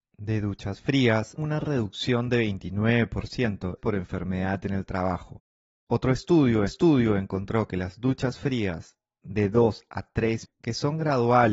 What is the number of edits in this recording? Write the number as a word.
four